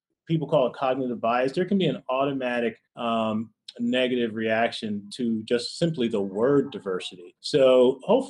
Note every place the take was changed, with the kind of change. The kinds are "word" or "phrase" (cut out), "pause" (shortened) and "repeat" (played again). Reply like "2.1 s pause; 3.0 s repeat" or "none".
2.9 s pause; 7.4 s pause